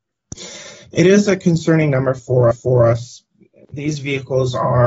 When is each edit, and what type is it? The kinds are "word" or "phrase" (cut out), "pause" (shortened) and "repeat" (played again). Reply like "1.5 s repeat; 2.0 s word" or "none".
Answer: 2.5 s repeat